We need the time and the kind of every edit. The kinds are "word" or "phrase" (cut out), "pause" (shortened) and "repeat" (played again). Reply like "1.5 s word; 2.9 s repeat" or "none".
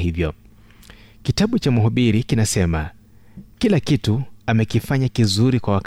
none